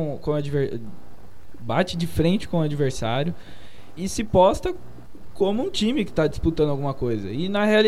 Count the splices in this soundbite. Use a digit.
1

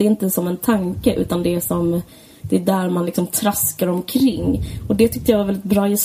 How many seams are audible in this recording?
0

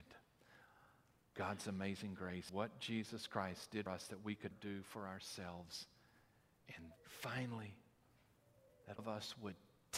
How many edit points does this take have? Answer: 6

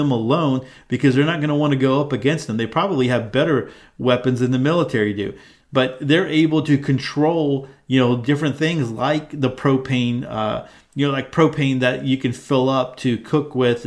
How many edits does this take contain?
0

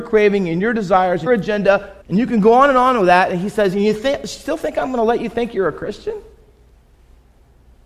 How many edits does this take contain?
2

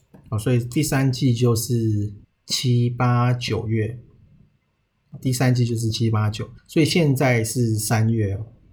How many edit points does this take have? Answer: 3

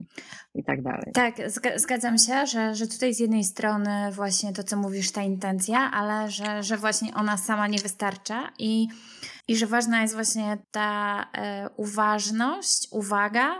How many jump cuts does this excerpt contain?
2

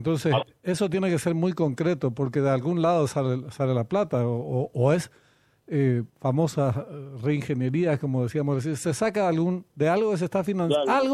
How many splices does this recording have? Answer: 1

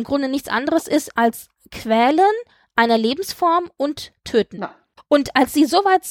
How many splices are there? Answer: 0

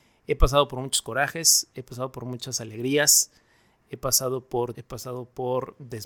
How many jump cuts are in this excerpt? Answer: 1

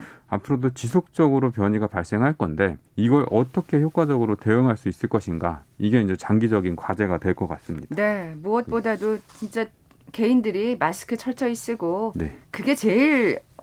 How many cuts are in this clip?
3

